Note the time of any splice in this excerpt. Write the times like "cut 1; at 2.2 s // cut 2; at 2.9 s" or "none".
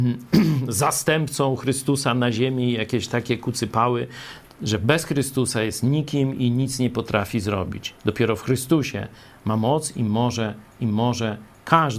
cut 1; at 10.8 s